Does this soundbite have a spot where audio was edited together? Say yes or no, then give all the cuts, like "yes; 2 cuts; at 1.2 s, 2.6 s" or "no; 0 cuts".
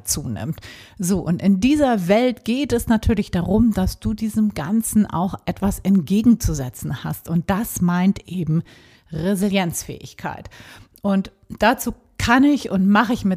no; 0 cuts